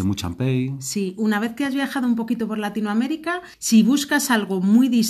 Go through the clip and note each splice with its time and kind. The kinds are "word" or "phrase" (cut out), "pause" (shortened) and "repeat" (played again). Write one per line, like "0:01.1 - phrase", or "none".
0:03.5 - pause